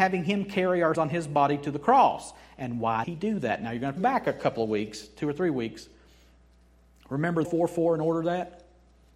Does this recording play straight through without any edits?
no; 4 cuts; at 0.9 s, 3.0 s, 4.0 s, 7.4 s

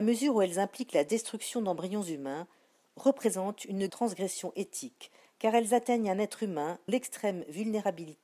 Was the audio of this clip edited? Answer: yes; 2 cuts; at 3.9 s, 6.9 s

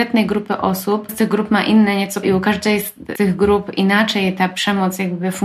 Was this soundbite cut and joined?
yes; 3 cuts; at 1.1 s, 2.2 s, 3.1 s

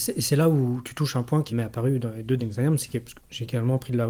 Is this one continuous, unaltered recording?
no; 3 cuts; at 1.5 s, 2.4 s, 3.2 s

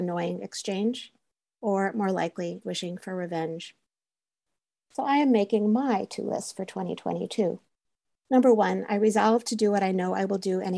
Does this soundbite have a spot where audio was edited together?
yes; 1 cut; at 2.6 s

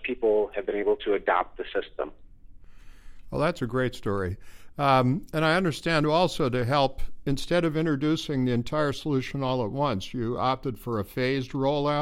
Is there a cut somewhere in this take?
no; 0 cuts

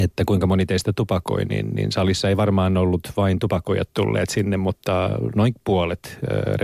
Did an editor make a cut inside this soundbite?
no; 0 cuts

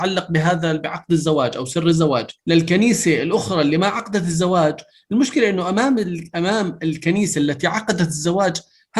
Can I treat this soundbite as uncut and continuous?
no; 1 cut; at 2.4 s

